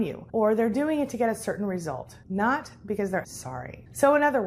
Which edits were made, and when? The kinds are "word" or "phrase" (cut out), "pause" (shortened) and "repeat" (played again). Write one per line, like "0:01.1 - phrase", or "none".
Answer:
0:03.2 - word